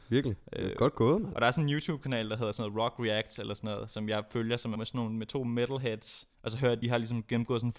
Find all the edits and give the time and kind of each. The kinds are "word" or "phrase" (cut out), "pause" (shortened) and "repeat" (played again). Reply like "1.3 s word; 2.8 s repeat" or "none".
4.8 s phrase; 6.3 s pause; 6.8 s word